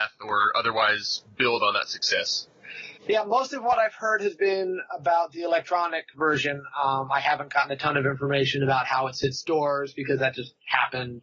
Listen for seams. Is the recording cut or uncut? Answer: cut